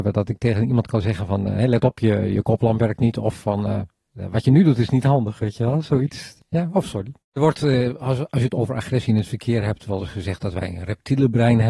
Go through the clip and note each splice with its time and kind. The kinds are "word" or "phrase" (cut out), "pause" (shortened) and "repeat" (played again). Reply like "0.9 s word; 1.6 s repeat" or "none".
7.2 s pause

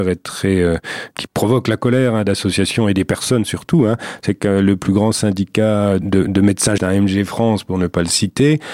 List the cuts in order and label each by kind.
1.1 s word; 6.0 s word; 6.8 s word

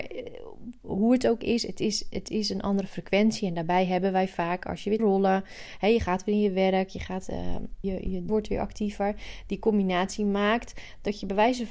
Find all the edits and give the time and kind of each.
5.0 s phrase; 7.8 s word; 8.3 s phrase

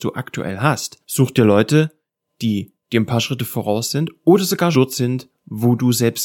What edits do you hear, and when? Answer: 1.0 s pause; 2.8 s pause; 4.7 s word

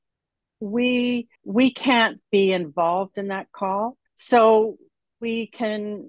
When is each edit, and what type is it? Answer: 1.4 s pause; 4.1 s pause

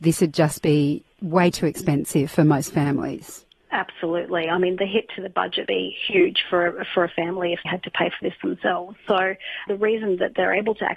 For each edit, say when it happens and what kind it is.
1.1 s pause; 5.7 s word; 7.6 s word; 9.7 s word

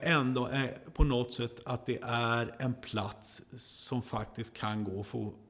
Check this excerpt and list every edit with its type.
none

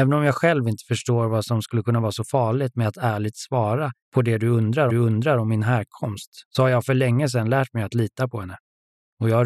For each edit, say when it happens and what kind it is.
4.0 s pause; 4.9 s repeat; 6.5 s pause

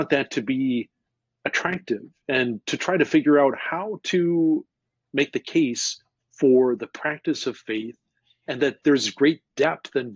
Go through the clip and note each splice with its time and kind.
none

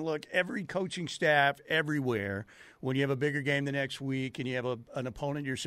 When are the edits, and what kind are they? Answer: none

